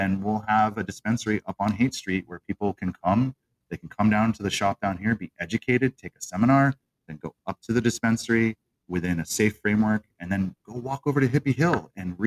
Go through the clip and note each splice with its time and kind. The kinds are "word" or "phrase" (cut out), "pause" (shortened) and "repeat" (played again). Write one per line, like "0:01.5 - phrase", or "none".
none